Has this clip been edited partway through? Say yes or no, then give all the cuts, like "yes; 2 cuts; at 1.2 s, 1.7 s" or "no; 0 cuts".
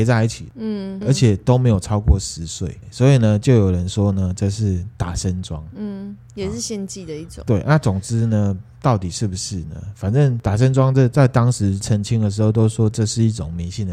yes; 1 cut; at 1.0 s